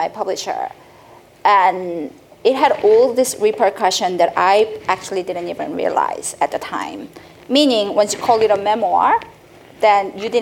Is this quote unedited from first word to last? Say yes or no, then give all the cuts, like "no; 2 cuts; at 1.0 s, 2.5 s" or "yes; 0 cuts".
yes; 0 cuts